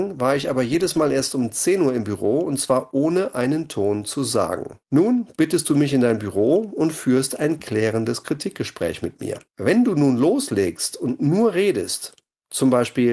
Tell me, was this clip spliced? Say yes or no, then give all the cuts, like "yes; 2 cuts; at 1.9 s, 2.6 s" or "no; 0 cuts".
yes; 2 cuts; at 4.8 s, 9.5 s